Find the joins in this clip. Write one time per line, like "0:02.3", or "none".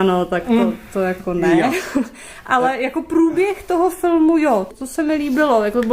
0:04.7